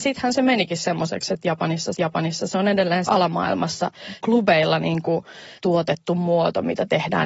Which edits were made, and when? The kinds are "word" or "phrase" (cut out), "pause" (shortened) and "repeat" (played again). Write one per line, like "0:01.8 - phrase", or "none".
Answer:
0:01.9 - repeat
0:03.1 - word
0:04.2 - word
0:05.6 - pause